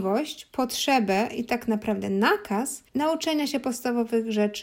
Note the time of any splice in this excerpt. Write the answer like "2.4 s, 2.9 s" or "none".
2.9 s